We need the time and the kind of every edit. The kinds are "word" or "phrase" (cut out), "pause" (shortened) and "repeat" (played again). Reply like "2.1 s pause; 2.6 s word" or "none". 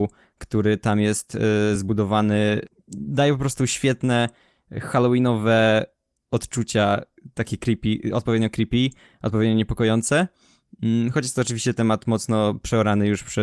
none